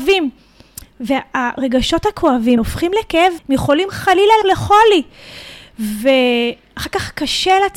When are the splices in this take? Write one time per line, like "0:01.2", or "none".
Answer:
0:02.6
0:03.4
0:04.4